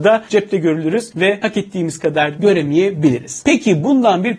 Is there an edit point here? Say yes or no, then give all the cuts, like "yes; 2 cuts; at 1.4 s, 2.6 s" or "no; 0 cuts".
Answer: yes; 1 cut; at 2.4 s